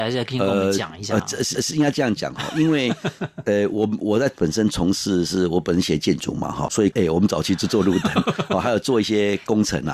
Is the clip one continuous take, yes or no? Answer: no